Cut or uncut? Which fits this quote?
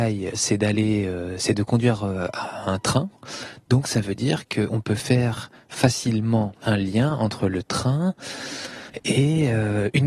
uncut